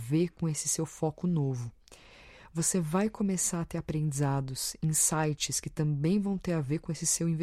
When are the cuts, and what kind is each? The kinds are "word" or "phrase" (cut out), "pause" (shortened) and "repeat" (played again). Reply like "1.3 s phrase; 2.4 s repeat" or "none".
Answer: none